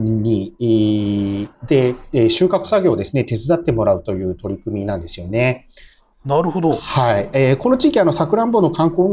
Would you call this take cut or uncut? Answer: uncut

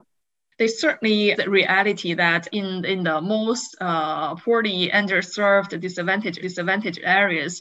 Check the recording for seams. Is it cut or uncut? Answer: cut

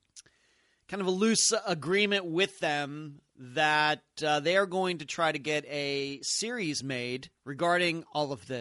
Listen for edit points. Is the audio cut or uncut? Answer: cut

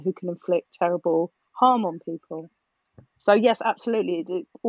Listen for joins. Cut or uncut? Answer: uncut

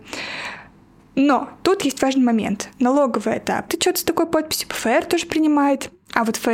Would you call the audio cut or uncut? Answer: cut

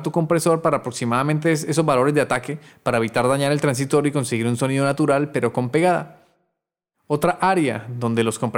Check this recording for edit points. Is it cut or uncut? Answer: uncut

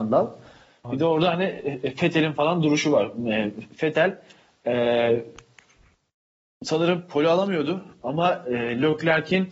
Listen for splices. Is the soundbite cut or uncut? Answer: uncut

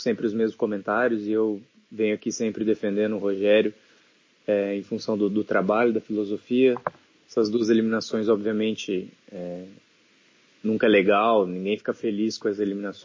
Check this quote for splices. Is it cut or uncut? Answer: uncut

